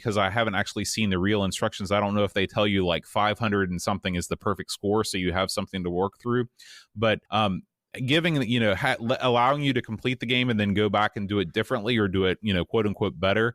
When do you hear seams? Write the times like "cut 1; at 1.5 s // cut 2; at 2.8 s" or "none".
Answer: cut 1; at 7.3 s

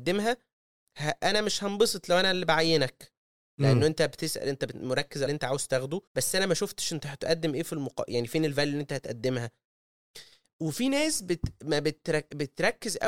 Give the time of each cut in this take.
cut 1; at 5.3 s // cut 2; at 6.1 s

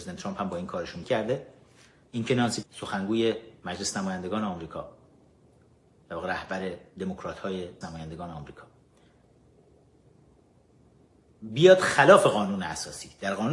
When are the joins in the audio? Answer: cut 1; at 1.0 s // cut 2; at 2.6 s // cut 3; at 7.8 s

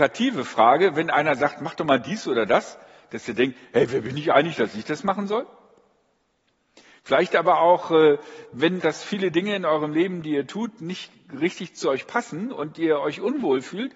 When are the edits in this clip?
cut 1; at 8.8 s

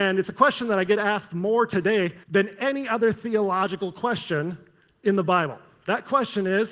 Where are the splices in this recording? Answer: cut 1; at 2.2 s

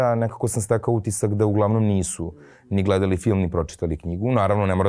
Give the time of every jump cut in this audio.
none

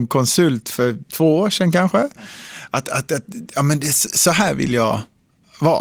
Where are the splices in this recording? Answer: none

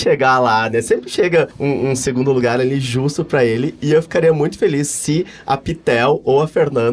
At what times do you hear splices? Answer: cut 1; at 1.5 s

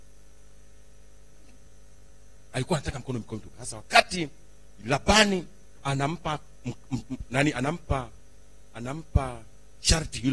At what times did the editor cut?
none

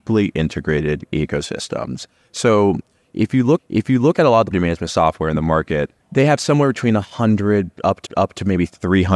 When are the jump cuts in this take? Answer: cut 1; at 3.6 s // cut 2; at 4.5 s // cut 3; at 6.0 s // cut 4; at 8.1 s

